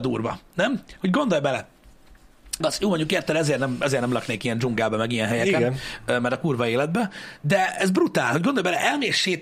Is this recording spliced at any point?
yes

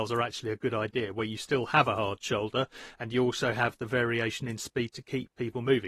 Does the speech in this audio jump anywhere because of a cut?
no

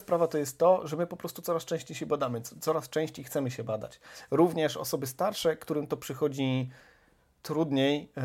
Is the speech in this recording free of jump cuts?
yes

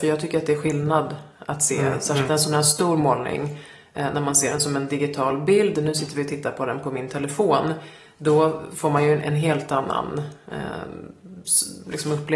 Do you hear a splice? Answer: no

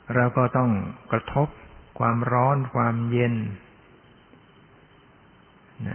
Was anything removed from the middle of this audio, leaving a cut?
yes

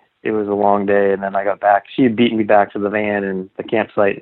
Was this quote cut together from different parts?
no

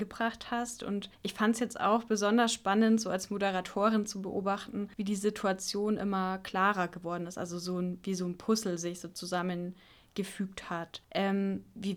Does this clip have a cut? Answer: yes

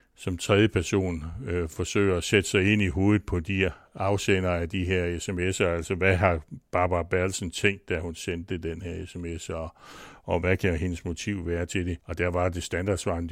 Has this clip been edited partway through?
no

